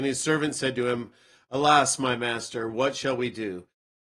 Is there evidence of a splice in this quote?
no; 0 cuts

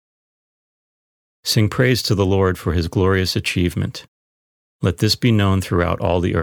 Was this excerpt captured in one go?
yes; 0 cuts

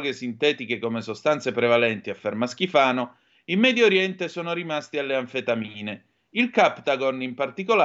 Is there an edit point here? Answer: no; 0 cuts

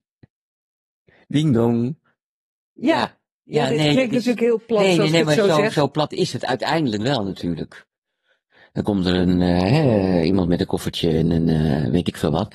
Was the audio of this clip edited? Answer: no; 0 cuts

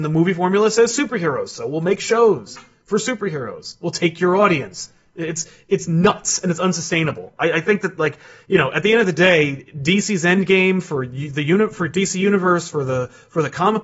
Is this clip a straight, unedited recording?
yes; 0 cuts

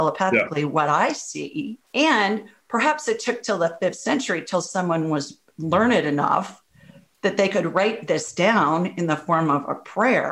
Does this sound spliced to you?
yes; 1 cut; at 1.8 s

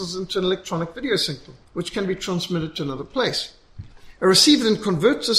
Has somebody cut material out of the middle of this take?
yes; 1 cut; at 1.6 s

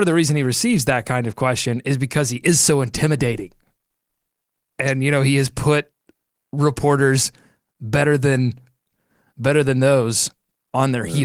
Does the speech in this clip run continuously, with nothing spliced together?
yes; 0 cuts

